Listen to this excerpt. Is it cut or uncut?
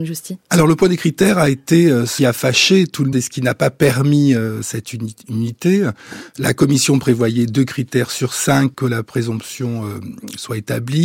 cut